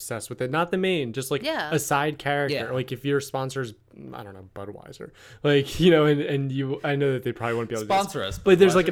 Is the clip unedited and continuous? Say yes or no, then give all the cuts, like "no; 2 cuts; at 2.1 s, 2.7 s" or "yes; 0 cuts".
yes; 0 cuts